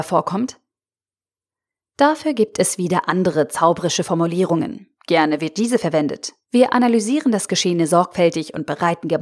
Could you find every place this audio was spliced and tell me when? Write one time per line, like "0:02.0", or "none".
0:05.0
0:06.4

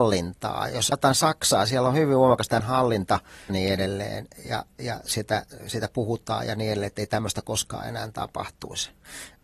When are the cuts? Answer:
0:00.9
0:02.6
0:03.5
0:05.6

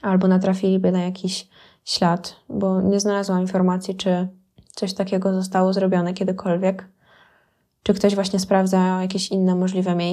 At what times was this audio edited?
0:04.6

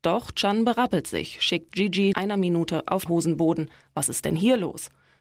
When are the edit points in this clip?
0:01.7
0:02.1
0:03.1

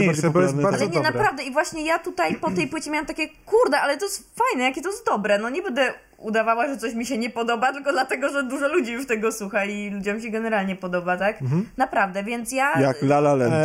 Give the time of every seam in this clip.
none

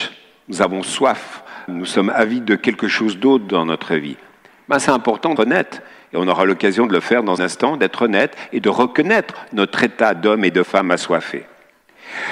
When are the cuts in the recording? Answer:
0:01.7
0:05.4
0:07.4

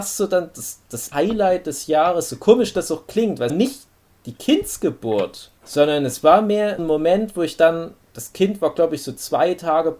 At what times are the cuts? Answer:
0:01.1
0:03.5
0:05.6
0:06.8
0:08.0

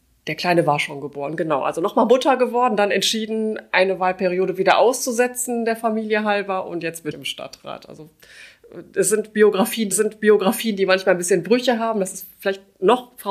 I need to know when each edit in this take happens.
0:07.1
0:09.9

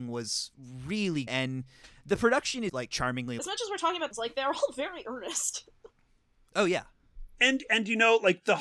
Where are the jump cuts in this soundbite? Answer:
0:01.3
0:02.7
0:03.4
0:04.1

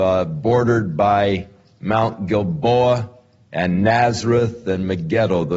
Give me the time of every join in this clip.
none

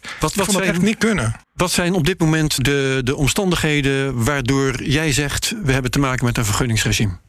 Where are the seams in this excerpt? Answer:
0:01.4
0:02.6

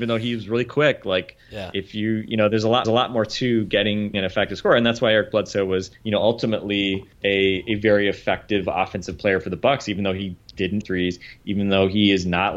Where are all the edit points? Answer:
0:02.8
0:04.1
0:05.9
0:07.1
0:10.8

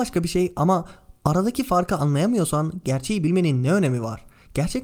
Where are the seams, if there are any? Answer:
none

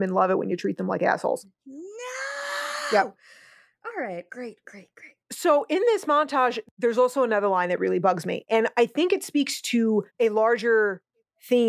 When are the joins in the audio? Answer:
0:01.5
0:04.3
0:05.2
0:10.1

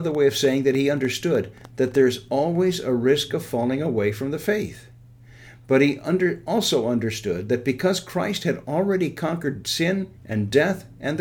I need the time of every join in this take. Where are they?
0:10.2

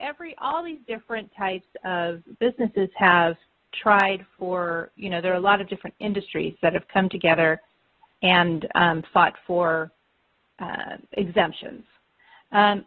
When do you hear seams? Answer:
none

